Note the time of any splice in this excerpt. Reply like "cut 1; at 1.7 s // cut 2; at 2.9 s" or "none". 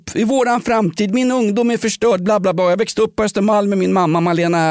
none